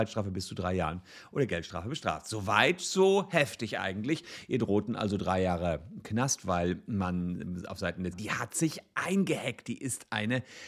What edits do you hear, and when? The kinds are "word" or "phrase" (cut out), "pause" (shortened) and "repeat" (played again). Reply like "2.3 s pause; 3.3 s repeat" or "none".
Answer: 8.1 s phrase